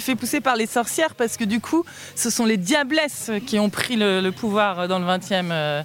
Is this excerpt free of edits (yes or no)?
yes